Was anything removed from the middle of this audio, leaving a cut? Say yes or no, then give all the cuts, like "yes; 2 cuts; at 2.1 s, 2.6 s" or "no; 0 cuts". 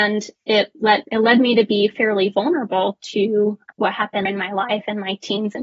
yes; 3 cuts; at 1.0 s, 3.7 s, 4.3 s